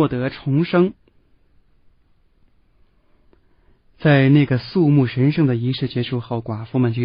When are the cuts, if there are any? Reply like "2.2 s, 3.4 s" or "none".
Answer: none